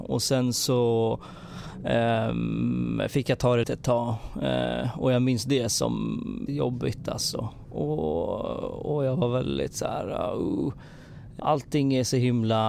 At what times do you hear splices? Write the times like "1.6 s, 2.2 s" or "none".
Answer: 3.6 s, 6.5 s, 11.4 s